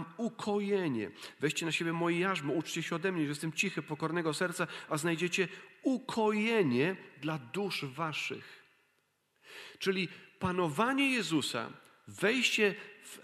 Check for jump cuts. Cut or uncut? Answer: uncut